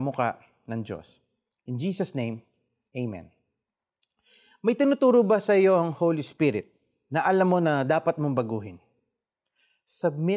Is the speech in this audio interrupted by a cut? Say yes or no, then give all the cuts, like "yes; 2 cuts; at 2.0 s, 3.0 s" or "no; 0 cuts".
no; 0 cuts